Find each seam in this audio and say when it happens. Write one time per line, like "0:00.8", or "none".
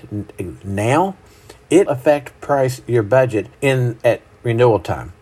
0:01.9
0:03.5